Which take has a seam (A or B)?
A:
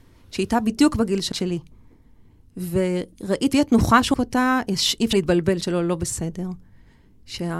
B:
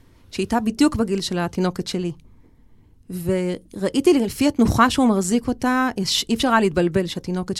A